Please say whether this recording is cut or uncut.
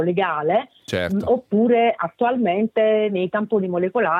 uncut